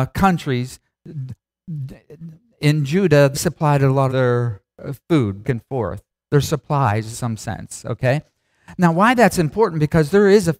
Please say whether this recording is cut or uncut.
cut